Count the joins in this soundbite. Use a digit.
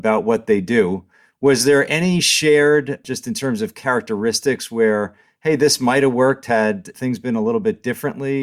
0